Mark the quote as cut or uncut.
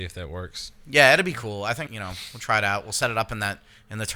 cut